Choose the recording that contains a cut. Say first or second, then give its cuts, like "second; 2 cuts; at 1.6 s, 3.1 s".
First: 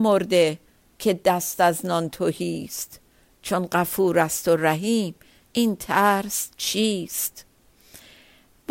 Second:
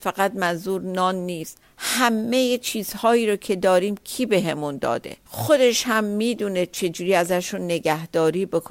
second; 2 cuts; at 1.6 s, 5.2 s